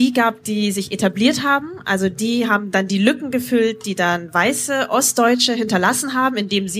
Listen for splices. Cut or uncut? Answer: uncut